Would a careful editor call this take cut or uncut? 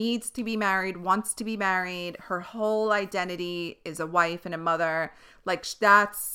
uncut